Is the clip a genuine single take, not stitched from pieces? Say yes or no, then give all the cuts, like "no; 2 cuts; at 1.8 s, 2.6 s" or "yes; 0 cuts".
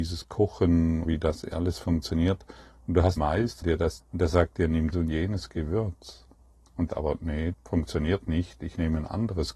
no; 7 cuts; at 1.0 s, 3.2 s, 3.6 s, 4.0 s, 4.9 s, 6.9 s, 7.5 s